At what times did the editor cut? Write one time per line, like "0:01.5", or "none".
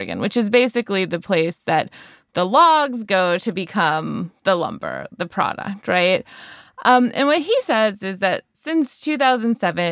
none